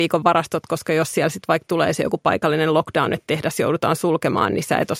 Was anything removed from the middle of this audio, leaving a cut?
no; 0 cuts

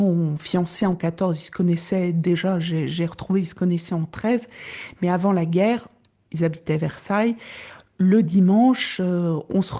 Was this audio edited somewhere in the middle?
no; 0 cuts

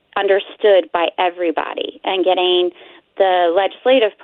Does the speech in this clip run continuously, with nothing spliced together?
yes; 0 cuts

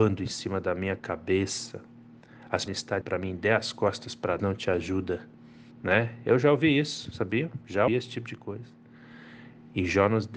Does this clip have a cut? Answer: yes; 5 cuts; at 2.7 s, 3.0 s, 4.4 s, 5.7 s, 7.9 s

